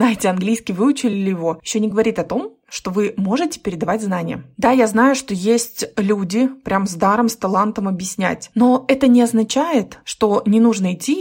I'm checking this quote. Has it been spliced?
no; 0 cuts

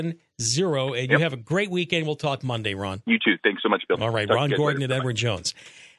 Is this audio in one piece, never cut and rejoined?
yes; 0 cuts

